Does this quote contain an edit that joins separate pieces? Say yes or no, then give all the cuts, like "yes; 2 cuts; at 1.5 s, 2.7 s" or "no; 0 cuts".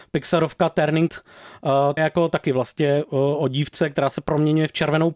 yes; 2 cuts; at 1.1 s, 2.0 s